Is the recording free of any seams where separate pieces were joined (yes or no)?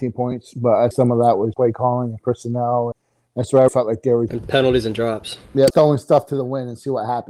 no